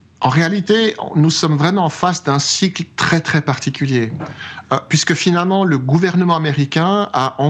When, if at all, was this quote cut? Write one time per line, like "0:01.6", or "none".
none